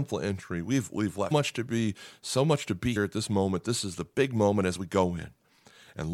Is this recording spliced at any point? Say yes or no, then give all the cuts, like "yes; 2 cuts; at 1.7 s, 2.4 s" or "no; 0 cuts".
yes; 2 cuts; at 1.3 s, 3.0 s